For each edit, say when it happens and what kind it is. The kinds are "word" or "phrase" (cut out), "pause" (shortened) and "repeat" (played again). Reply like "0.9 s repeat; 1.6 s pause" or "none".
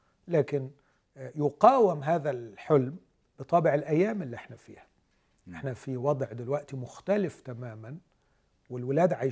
none